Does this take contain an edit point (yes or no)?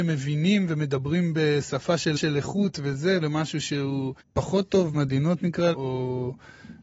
yes